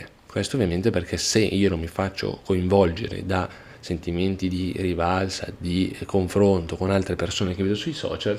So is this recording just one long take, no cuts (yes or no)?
yes